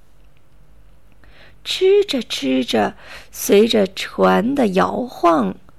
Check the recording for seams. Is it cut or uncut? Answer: uncut